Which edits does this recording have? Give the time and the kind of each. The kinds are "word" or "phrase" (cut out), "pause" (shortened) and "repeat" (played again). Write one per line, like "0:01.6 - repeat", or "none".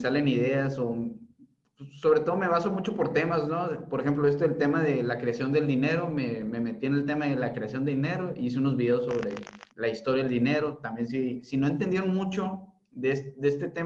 0:09.7 - pause